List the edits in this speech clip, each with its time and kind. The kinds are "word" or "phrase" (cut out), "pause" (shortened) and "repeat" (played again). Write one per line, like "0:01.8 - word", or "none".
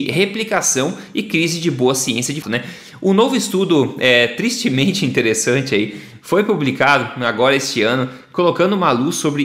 0:02.4 - word